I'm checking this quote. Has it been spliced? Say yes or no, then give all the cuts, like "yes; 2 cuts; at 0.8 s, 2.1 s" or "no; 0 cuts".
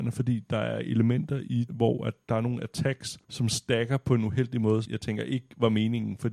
yes; 3 cuts; at 1.7 s, 3.2 s, 4.8 s